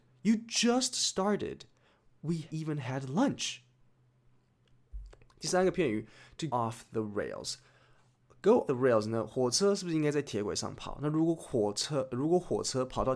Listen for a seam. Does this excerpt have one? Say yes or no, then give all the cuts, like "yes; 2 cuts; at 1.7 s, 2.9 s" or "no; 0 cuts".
yes; 3 cuts; at 2.5 s, 6.5 s, 8.7 s